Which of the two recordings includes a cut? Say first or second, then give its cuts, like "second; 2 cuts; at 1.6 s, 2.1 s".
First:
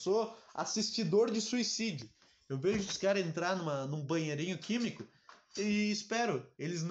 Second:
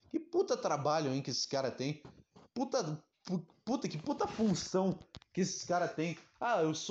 first; 1 cut; at 5.6 s